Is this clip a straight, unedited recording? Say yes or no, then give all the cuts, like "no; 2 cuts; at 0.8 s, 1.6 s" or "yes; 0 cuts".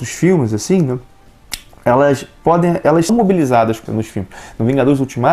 no; 2 cuts; at 3.1 s, 3.9 s